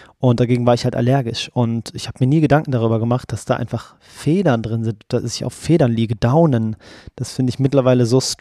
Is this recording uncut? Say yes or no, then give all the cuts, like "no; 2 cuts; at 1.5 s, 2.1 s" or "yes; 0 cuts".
yes; 0 cuts